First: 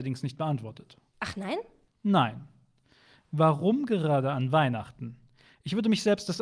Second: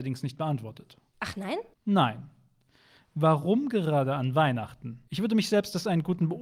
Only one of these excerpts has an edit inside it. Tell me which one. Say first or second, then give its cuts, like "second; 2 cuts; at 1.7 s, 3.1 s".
second; 2 cuts; at 1.7 s, 5.1 s